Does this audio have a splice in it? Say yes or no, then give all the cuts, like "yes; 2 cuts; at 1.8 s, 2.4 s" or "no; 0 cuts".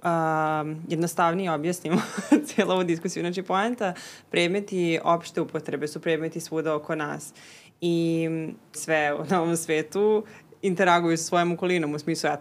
yes; 1 cut; at 8.7 s